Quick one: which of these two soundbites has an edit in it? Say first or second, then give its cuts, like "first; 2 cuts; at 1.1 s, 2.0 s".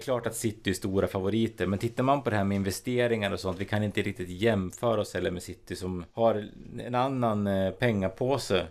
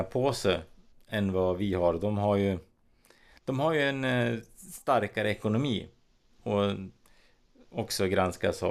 first; 1 cut; at 6.1 s